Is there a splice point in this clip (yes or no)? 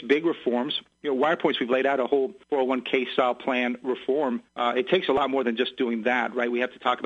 yes